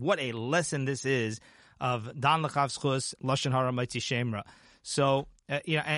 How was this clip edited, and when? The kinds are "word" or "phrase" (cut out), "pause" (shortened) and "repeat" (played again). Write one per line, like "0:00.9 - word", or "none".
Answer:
0:03.2 - word